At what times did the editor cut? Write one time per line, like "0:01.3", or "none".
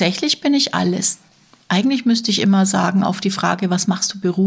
none

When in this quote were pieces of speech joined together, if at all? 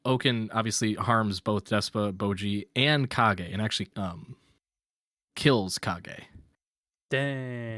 0:03.9

